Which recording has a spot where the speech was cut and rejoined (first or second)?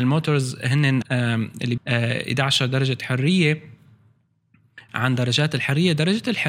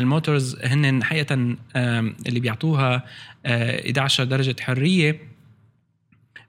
first